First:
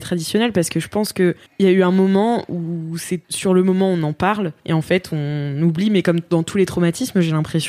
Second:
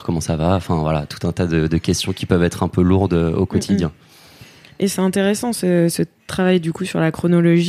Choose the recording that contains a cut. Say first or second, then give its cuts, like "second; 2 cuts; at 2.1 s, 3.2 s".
first; 3 cuts; at 1.5 s, 3.2 s, 4.6 s